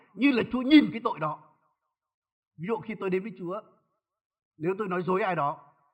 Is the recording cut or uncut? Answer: uncut